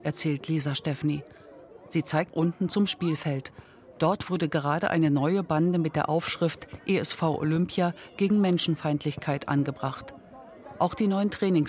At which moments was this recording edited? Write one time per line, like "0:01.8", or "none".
0:02.3